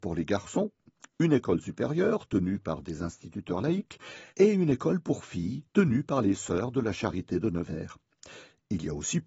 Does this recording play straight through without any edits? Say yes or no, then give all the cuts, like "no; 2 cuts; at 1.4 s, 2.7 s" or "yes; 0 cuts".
no; 2 cuts; at 4.3 s, 5.7 s